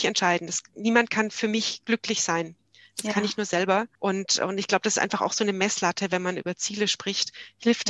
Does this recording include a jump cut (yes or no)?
yes